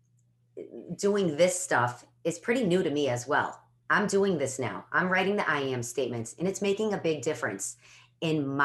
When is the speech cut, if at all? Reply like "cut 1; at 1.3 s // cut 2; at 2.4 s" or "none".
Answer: none